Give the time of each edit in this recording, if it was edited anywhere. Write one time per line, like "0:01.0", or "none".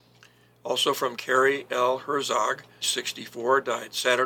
0:01.1
0:02.8